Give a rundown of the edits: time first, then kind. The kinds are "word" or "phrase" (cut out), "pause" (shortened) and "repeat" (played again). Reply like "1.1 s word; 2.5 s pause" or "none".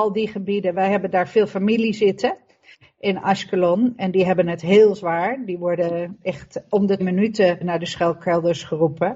7.0 s word; 7.6 s word